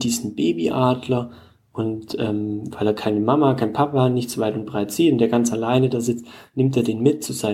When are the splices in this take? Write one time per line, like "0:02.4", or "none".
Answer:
none